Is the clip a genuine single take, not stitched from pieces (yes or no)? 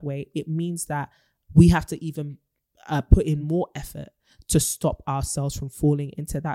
yes